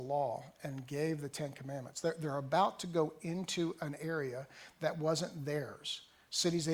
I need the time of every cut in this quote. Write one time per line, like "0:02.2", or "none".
none